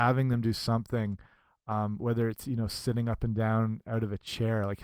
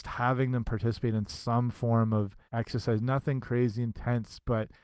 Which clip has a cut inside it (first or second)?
second